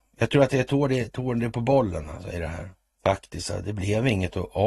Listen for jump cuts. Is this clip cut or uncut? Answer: cut